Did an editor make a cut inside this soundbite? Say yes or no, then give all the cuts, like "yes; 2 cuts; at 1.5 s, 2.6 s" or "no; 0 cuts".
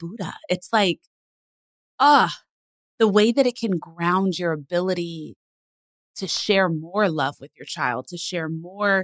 no; 0 cuts